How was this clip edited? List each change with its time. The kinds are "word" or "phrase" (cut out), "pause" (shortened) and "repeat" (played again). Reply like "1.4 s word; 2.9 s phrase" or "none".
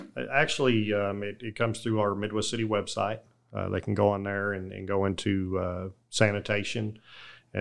none